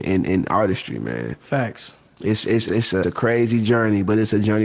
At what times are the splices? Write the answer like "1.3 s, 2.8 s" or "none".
2.7 s, 3.0 s